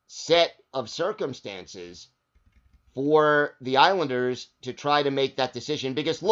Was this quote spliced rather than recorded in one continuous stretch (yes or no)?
no